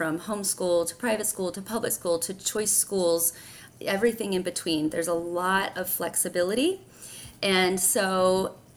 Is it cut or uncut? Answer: cut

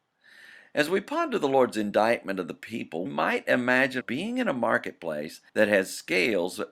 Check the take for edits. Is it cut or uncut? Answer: cut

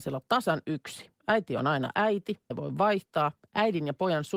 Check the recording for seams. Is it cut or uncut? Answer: cut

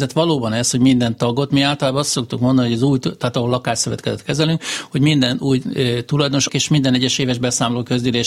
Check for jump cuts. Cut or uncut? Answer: cut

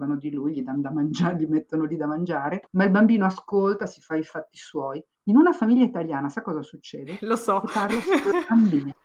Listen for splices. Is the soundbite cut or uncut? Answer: uncut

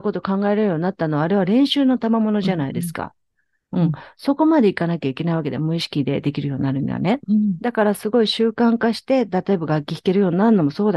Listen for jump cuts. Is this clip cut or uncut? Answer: uncut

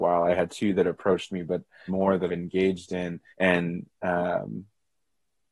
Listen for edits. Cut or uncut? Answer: cut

